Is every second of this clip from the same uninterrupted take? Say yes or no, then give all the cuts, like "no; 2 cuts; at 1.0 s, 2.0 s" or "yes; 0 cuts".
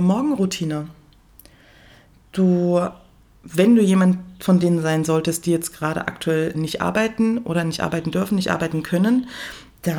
no; 1 cut; at 6.5 s